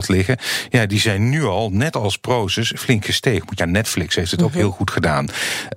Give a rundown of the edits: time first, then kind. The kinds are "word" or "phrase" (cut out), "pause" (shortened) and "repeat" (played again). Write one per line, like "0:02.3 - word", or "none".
0:03.6 - word